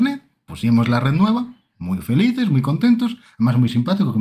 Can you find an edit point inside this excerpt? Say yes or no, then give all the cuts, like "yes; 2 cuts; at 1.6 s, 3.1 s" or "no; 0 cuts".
no; 0 cuts